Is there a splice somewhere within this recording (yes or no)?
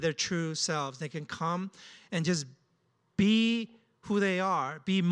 no